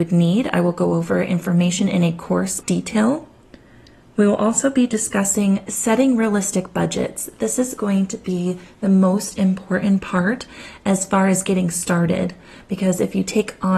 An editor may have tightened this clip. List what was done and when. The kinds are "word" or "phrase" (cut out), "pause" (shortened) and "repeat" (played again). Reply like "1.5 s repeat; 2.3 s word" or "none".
2.6 s word